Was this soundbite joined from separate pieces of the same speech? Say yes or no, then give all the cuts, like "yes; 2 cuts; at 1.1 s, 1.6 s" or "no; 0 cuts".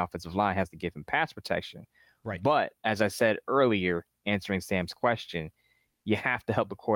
no; 0 cuts